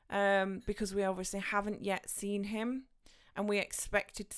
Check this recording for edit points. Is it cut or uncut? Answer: uncut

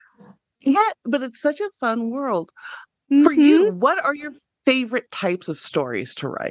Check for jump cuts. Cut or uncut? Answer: uncut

